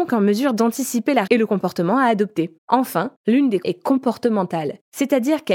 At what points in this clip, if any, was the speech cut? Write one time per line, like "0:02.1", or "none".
0:01.3
0:02.6
0:03.6